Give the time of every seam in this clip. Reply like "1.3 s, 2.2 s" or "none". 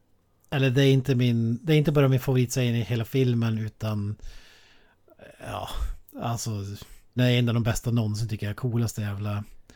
7.2 s